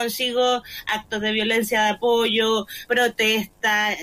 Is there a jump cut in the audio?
yes; 1 cut; at 2.9 s

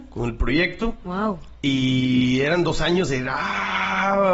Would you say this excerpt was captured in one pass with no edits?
yes; 0 cuts

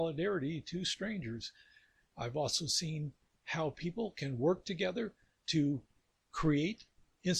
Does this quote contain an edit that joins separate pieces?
no; 0 cuts

